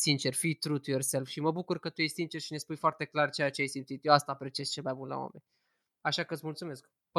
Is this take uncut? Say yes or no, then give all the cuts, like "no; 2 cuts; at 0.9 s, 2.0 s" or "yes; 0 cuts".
yes; 0 cuts